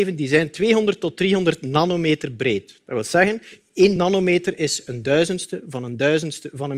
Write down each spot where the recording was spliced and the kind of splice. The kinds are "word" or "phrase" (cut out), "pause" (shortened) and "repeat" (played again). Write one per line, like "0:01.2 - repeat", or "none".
none